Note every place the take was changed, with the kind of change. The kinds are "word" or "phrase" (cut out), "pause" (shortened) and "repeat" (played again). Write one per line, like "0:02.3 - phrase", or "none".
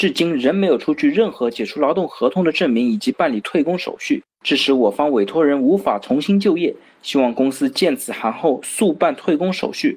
0:04.3 - pause

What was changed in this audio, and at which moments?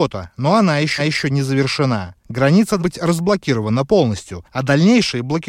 0:01.0 - repeat
0:02.8 - word

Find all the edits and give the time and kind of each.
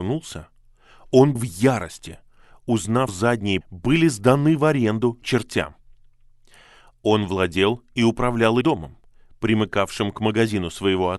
0:01.4 - word
0:03.1 - word
0:03.6 - word
0:05.2 - word
0:08.6 - word

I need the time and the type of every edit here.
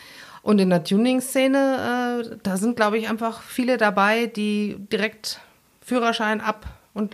none

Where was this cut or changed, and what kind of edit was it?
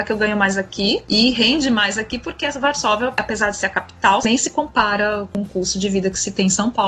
none

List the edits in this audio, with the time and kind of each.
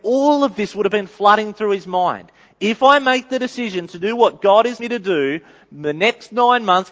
0:04.8 - word

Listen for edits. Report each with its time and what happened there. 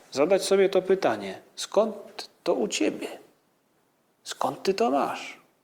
none

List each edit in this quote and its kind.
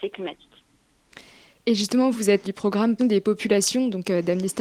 0:02.1 - word
0:02.4 - word
0:03.0 - word

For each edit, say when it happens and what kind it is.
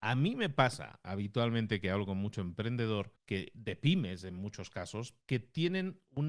0:03.2 - pause
0:05.2 - pause

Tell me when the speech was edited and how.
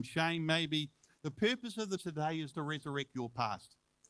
0:01.2 - word
0:02.0 - word
0:02.5 - word

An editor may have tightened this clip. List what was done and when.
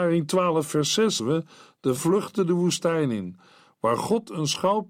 0:01.2 - word
0:02.0 - word

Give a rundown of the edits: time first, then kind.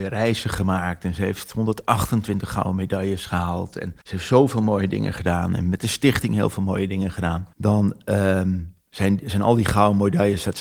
0:04.0 - pause
0:07.5 - pause
0:08.8 - pause

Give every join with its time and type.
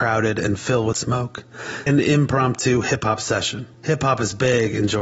0:00.9 - word
0:01.9 - word
0:03.7 - pause

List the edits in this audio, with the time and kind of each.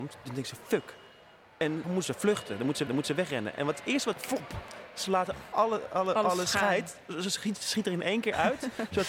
0:01.8 - word
0:02.9 - repeat
0:04.1 - phrase
0:05.5 - word

